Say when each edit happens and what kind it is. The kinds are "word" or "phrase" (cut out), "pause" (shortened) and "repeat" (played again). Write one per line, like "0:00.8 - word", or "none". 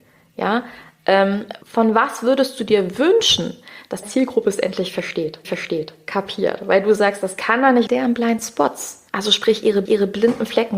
0:01.6 - pause
0:04.0 - word
0:05.4 - repeat
0:07.9 - phrase
0:09.1 - pause
0:09.9 - repeat